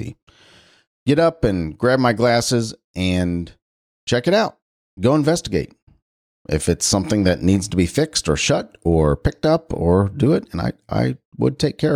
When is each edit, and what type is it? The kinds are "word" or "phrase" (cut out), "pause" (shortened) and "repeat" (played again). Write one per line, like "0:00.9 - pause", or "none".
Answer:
none